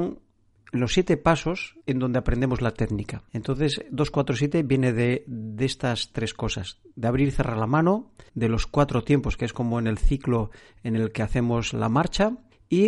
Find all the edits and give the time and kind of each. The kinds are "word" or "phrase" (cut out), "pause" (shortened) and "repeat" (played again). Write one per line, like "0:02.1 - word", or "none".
0:01.8 - pause
0:03.3 - pause
0:08.3 - pause